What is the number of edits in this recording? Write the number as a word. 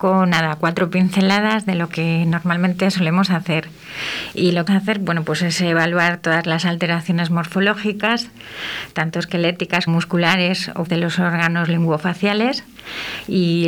three